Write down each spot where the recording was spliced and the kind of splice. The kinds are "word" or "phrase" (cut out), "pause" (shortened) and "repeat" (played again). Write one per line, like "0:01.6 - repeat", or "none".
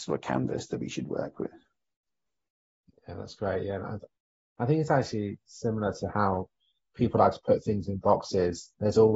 none